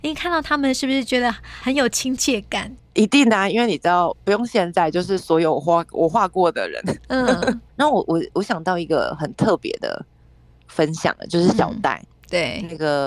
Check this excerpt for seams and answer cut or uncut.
uncut